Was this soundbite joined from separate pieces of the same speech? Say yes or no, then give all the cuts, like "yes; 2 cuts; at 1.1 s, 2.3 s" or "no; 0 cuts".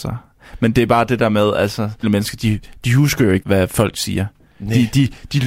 yes; 2 cuts; at 2.0 s, 3.4 s